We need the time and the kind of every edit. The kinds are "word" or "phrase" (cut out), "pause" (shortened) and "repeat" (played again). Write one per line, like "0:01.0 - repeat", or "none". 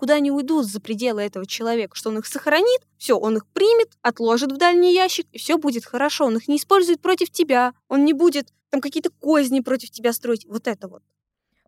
0:02.9 - pause
0:04.0 - pause
0:07.8 - pause
0:08.6 - pause